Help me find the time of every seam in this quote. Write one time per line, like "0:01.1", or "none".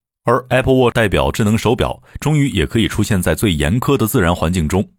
0:00.9